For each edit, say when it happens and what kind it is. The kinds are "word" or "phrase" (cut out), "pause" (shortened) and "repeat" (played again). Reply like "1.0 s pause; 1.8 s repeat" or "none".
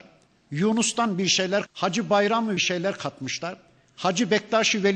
1.7 s word; 2.6 s phrase